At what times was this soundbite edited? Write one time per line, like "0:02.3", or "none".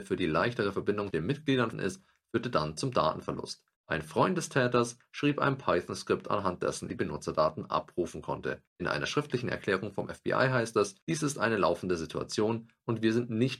0:01.1
0:01.7
0:03.7
0:06.9
0:08.7
0:11.0